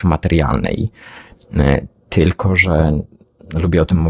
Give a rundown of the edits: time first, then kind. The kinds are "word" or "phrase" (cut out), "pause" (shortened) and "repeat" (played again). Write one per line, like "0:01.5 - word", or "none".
none